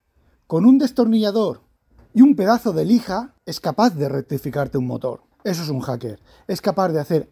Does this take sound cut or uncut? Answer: cut